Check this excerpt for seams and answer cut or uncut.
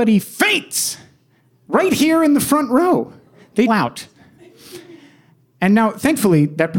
cut